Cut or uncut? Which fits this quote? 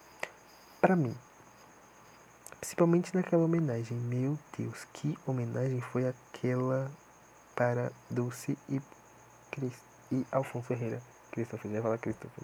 uncut